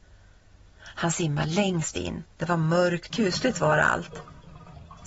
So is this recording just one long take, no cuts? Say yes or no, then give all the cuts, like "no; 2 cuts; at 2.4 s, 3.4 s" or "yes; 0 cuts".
no; 2 cuts; at 2.3 s, 3.1 s